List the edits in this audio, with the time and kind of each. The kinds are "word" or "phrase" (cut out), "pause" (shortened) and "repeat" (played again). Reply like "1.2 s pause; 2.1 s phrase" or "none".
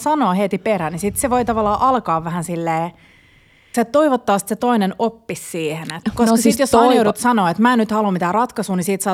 3.7 s word; 6.0 s word